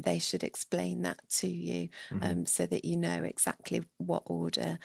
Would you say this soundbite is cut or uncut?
uncut